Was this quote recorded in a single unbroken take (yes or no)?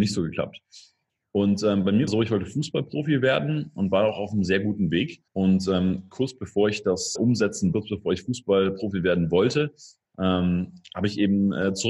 no